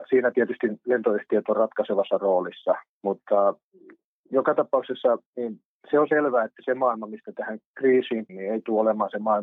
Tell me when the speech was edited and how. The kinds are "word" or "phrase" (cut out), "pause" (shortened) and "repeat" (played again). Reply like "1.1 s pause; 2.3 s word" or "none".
2.9 s pause; 5.3 s pause; 8.3 s word

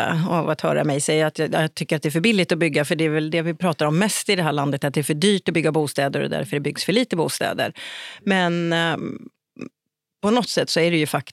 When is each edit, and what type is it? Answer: none

